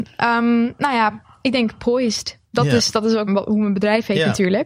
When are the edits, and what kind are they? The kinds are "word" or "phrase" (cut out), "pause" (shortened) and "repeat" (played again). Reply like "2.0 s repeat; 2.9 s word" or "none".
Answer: 2.4 s pause; 3.3 s word